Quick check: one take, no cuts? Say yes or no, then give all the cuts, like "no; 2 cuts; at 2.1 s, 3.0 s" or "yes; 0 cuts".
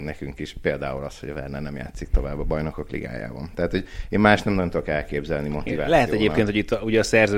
yes; 0 cuts